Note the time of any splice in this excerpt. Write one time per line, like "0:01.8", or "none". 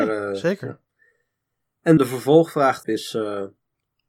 0:02.0
0:02.8